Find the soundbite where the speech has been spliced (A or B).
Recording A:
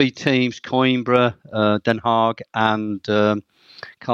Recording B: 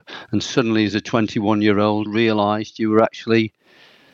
B